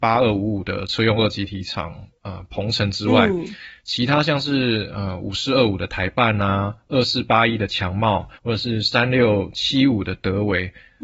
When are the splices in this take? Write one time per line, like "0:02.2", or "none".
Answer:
0:08.4